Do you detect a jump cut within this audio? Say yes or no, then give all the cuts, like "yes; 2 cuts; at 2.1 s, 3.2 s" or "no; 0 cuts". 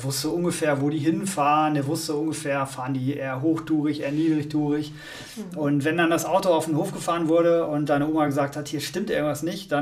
no; 0 cuts